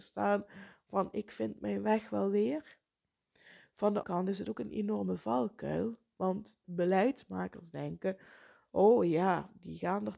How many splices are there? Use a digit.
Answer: 2